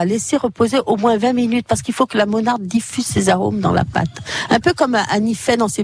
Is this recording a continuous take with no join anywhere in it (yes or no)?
yes